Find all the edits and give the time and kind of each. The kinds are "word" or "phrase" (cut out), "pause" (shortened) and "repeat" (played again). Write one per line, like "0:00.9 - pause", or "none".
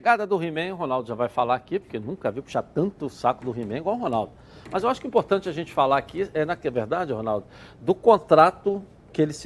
none